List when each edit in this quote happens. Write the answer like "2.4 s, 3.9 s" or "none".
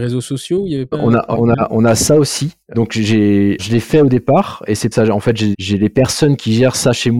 0.9 s, 1.3 s, 2.7 s, 3.6 s, 4.9 s, 5.5 s